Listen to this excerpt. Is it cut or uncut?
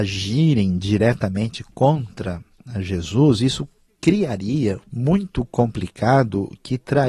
cut